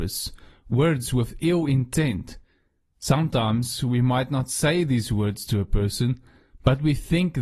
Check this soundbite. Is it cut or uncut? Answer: uncut